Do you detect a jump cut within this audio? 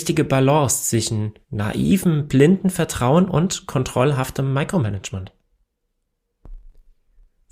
yes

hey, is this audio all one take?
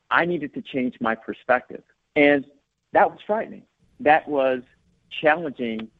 yes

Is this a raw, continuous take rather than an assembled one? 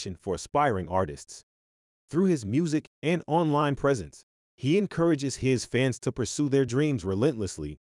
yes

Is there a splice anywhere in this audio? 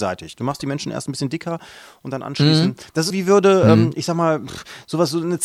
yes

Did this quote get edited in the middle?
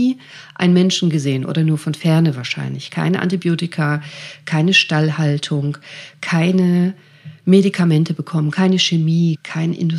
no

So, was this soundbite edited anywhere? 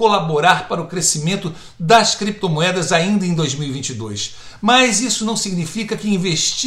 no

